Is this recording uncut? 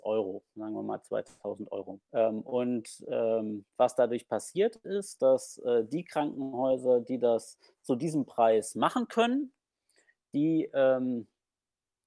no; 1 cut; at 2.1 s

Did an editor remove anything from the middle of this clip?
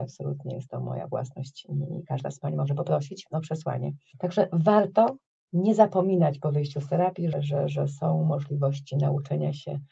yes; 1 cut; at 7.3 s

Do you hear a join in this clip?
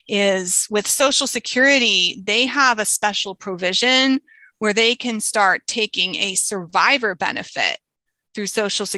no; 0 cuts

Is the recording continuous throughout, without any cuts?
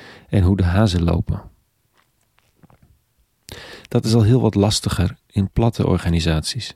yes; 0 cuts

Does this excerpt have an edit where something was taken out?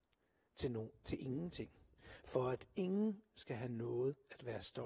no; 0 cuts

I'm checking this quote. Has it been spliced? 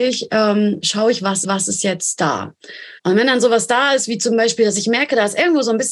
yes; 2 cuts; at 1.4 s, 3.0 s

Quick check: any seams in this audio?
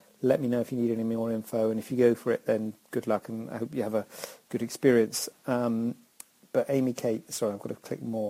no; 0 cuts

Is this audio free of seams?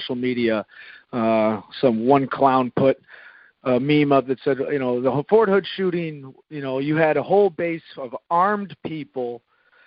yes; 0 cuts

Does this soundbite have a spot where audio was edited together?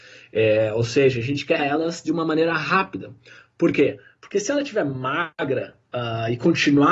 yes; 1 cut; at 1.6 s

